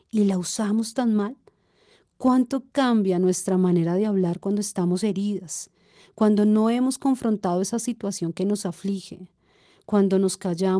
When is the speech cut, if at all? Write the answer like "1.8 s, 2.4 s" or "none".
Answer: none